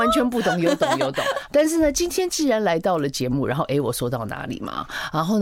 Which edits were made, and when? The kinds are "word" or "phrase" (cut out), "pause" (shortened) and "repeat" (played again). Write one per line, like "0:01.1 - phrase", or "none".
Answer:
0:01.5 - word